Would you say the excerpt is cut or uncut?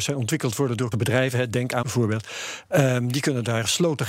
cut